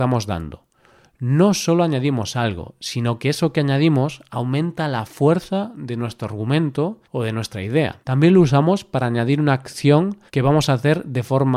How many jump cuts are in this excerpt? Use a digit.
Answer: 3